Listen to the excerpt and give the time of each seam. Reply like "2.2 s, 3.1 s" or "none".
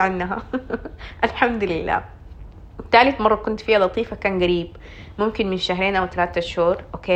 none